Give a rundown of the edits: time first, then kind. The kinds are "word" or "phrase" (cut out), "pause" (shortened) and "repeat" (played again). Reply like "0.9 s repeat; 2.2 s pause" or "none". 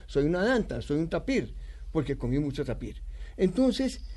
none